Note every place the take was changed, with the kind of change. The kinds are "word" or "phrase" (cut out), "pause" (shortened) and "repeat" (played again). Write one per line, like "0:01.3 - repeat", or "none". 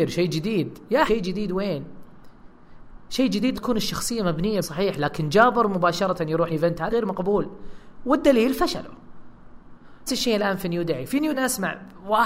0:01.1 - word
0:03.5 - word
0:04.6 - word
0:06.5 - word
0:06.9 - word
0:10.1 - word
0:11.3 - word